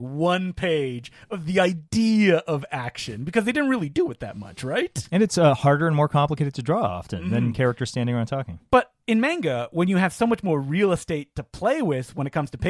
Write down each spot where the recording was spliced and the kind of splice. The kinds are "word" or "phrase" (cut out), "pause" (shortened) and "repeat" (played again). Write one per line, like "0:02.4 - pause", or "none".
none